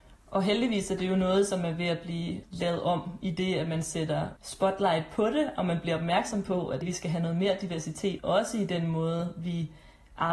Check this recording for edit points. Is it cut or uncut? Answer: cut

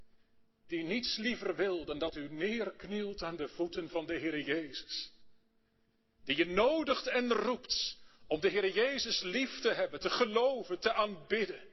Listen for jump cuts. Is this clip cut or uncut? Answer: uncut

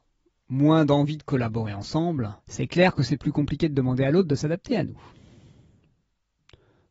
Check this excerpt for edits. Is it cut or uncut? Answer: cut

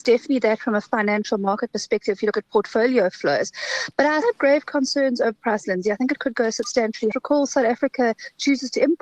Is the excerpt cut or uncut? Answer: cut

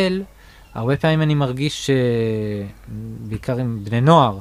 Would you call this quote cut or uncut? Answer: uncut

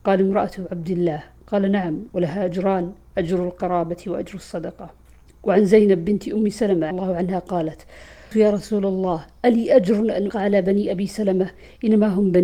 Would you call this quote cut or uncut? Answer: cut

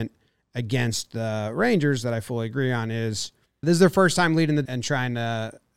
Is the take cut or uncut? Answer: cut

